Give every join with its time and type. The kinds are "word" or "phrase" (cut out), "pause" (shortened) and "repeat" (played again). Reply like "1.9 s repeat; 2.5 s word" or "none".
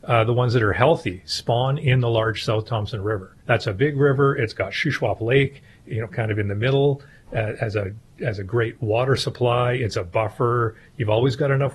3.4 s pause